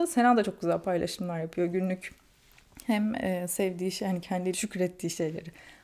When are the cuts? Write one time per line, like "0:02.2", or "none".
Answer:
0:04.5